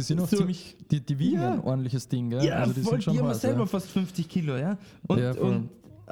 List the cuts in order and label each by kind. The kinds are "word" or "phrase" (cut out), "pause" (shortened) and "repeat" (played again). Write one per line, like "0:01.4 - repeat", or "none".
none